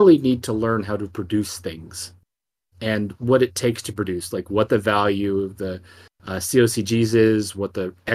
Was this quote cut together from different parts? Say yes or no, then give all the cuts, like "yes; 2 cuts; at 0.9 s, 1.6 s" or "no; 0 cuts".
no; 0 cuts